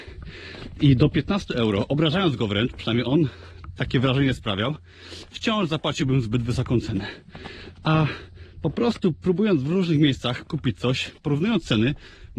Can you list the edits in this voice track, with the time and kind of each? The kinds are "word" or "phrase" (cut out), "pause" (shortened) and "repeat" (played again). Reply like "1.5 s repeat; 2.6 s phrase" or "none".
11.2 s pause